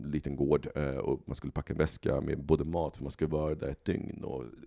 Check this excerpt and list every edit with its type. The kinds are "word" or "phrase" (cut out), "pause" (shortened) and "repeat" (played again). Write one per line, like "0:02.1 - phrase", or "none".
none